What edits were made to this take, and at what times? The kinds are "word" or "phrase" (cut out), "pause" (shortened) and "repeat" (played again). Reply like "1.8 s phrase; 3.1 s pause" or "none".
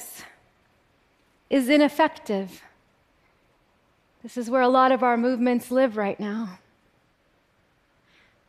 none